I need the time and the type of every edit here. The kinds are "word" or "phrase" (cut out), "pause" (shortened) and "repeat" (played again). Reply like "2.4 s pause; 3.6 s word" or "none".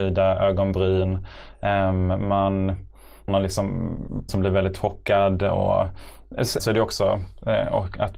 3.3 s word; 4.3 s word; 6.6 s word